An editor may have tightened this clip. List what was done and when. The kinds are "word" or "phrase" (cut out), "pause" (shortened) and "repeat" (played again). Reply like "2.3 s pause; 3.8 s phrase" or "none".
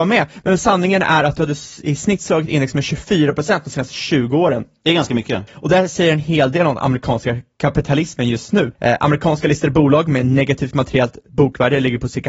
8.7 s pause